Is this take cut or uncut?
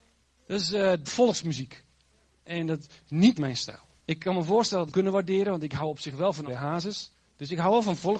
cut